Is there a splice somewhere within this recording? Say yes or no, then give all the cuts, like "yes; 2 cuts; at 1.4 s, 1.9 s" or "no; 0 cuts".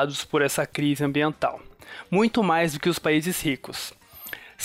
no; 0 cuts